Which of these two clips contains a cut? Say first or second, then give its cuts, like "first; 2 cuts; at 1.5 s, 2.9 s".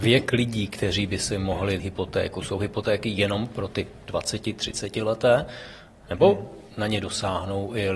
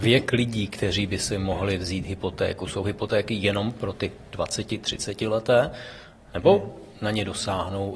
first; 1 cut; at 1.8 s